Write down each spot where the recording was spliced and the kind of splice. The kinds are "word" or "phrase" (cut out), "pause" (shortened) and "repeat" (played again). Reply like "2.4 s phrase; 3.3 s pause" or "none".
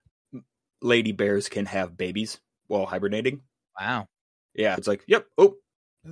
4.8 s word